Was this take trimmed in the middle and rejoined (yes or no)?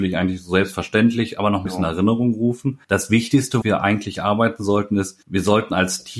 yes